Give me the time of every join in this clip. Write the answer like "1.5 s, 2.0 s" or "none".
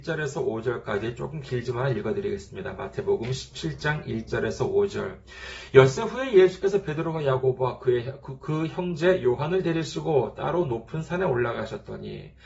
none